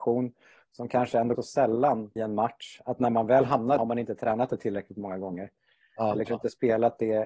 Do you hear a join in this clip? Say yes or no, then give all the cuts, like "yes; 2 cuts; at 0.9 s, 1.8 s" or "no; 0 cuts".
yes; 4 cuts; at 1.4 s, 2.2 s, 3.8 s, 6.3 s